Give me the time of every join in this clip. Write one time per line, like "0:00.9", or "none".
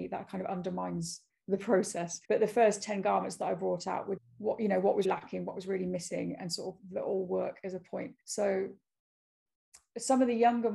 0:02.2
0:04.2
0:05.0
0:08.2